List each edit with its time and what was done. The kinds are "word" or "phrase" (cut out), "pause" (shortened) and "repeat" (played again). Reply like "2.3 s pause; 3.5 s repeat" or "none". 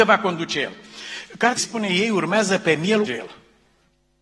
1.6 s word; 3.1 s phrase